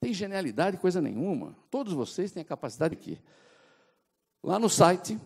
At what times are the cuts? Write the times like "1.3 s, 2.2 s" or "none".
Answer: 1.7 s, 2.9 s